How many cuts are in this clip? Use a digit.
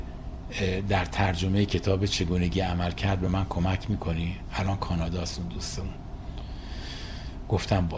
0